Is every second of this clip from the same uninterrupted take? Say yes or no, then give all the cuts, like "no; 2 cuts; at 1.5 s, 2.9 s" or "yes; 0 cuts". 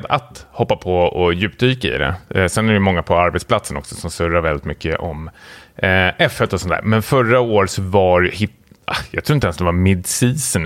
yes; 0 cuts